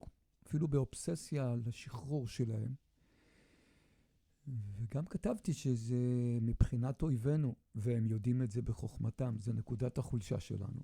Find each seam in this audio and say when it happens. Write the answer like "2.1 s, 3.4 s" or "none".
none